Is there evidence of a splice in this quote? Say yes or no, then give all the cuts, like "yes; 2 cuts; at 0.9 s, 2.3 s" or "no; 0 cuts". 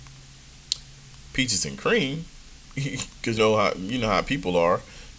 yes; 1 cut; at 3.4 s